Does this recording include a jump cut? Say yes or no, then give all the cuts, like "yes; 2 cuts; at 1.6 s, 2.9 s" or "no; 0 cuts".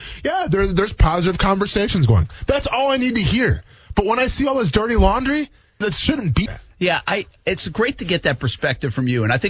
yes; 2 cuts; at 5.8 s, 6.5 s